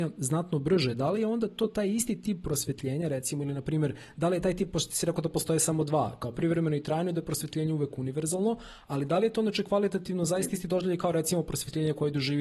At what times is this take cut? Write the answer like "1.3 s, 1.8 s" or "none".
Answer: none